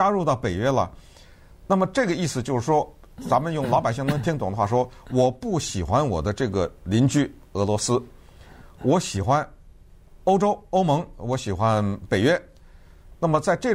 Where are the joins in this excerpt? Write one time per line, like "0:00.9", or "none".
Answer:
none